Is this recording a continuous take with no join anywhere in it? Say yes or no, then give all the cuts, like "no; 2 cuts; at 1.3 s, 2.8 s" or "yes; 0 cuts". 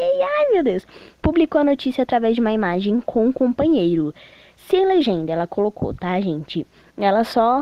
yes; 0 cuts